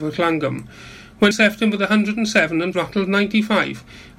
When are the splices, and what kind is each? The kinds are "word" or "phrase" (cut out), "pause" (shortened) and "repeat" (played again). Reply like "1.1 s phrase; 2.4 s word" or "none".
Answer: 1.3 s word; 2.7 s phrase

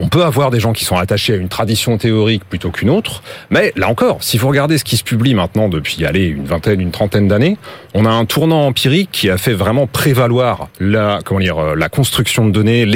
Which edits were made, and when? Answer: 10.7 s pause

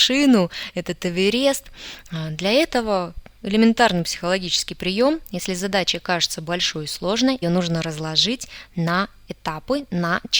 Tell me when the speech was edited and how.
7.4 s word

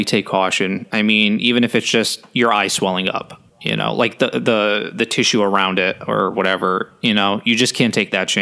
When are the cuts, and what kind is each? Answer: 3.5 s pause

